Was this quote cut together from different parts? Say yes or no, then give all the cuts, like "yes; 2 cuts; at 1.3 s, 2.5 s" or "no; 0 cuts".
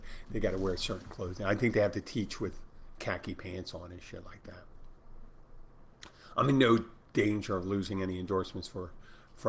no; 0 cuts